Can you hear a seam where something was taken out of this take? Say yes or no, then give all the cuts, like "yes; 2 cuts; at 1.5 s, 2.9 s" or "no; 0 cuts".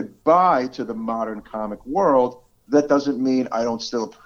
no; 0 cuts